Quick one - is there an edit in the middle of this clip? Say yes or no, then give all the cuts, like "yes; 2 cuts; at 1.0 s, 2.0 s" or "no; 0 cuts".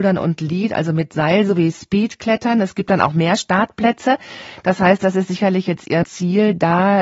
yes; 1 cut; at 6.0 s